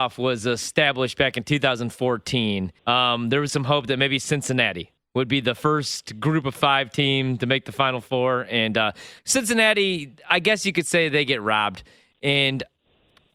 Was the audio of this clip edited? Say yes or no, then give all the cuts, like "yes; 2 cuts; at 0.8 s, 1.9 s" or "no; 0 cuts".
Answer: yes; 3 cuts; at 2.8 s, 3.5 s, 9.2 s